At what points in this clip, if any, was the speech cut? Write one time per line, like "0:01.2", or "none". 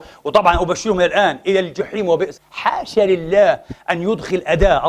0:02.4